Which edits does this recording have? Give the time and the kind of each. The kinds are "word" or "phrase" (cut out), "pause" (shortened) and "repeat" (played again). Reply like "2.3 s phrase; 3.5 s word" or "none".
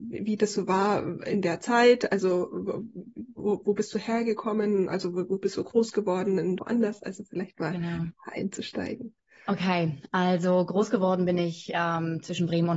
6.6 s phrase